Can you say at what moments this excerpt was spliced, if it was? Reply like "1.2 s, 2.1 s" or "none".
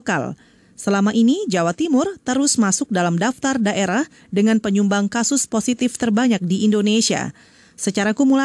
none

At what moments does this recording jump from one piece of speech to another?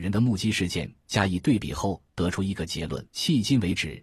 3.1 s

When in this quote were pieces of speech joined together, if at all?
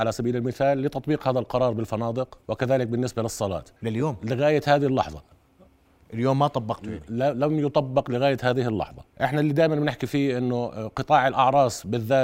2.4 s, 3.8 s, 9.1 s

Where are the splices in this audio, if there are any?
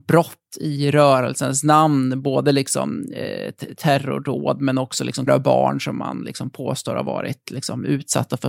5.3 s

